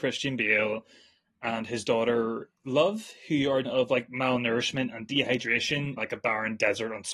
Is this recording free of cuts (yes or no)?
no